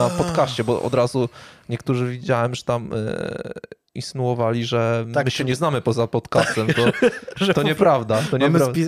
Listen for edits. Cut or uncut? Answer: uncut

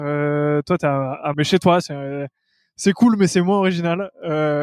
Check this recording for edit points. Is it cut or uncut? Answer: cut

